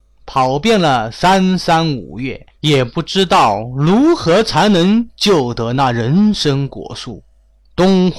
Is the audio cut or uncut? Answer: cut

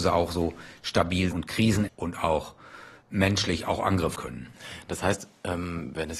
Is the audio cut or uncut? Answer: cut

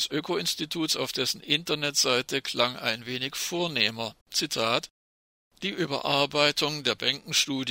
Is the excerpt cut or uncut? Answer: cut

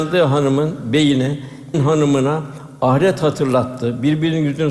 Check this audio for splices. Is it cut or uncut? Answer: cut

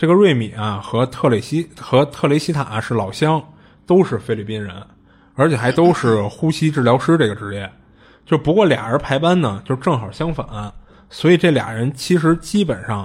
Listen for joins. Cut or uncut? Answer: uncut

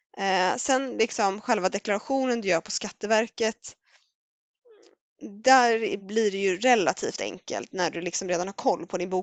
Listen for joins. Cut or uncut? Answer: uncut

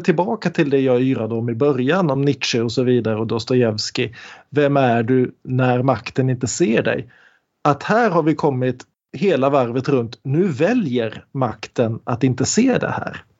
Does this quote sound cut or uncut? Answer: uncut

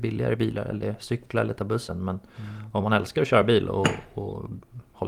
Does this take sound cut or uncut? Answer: uncut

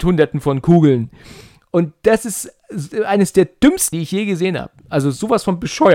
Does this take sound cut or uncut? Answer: cut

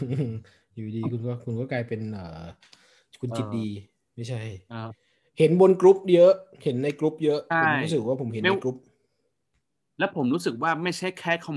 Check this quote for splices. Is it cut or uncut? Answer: uncut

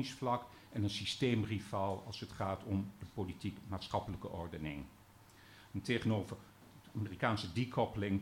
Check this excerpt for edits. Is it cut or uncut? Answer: uncut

